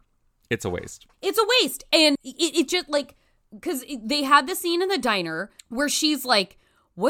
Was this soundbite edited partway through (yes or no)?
yes